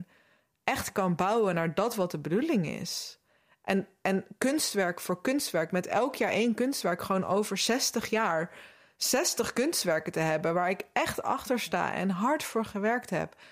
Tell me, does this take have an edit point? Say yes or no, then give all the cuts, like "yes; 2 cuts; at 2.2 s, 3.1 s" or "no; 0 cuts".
no; 0 cuts